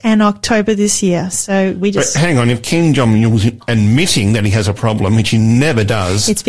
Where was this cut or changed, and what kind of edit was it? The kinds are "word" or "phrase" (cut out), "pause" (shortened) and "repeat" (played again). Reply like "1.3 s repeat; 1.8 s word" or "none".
none